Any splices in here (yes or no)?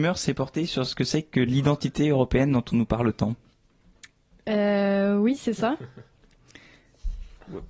no